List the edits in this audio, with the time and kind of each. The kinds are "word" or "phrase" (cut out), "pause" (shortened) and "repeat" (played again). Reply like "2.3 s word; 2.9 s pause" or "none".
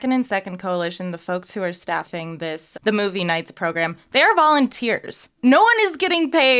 2.7 s word; 5.3 s pause